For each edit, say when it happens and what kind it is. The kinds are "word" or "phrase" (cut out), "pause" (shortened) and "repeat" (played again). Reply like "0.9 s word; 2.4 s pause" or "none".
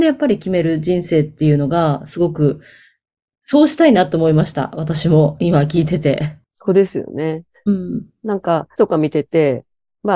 6.4 s pause; 8.8 s word